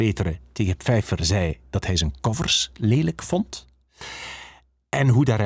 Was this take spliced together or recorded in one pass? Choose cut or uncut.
uncut